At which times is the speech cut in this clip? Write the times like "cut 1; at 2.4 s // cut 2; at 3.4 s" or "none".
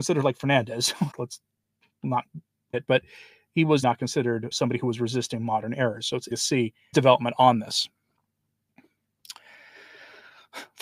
cut 1; at 1.1 s // cut 2; at 2.7 s // cut 3; at 3.8 s // cut 4; at 4.5 s // cut 5; at 6.3 s // cut 6; at 6.9 s